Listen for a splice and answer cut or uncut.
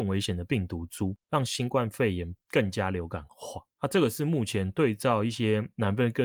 cut